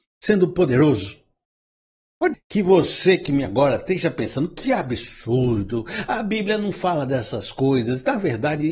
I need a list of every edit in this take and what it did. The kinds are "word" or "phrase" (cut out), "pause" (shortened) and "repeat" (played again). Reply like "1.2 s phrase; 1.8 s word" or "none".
2.3 s word; 3.5 s word